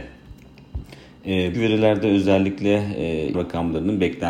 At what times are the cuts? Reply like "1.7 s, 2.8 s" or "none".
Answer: 1.5 s, 3.3 s

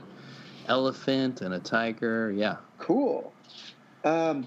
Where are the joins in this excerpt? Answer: 2.7 s

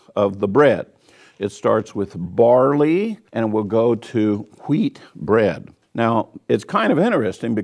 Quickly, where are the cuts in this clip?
3.3 s, 5.8 s

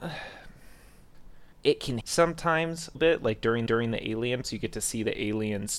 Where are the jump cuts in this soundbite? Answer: 1.5 s, 2.0 s, 2.9 s, 3.7 s, 4.4 s

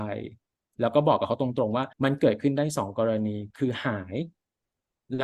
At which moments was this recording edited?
1.9 s

